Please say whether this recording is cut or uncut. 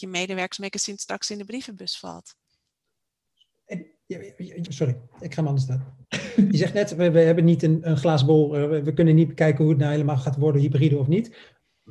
cut